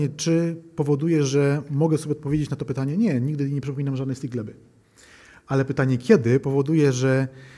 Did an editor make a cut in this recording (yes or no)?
no